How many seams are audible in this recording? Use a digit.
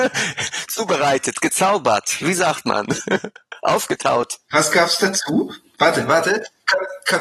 0